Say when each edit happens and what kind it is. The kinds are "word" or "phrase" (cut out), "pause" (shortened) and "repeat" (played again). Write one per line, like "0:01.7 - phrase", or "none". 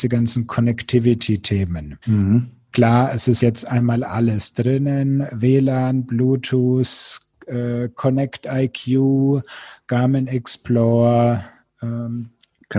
0:02.0 - pause
0:03.4 - word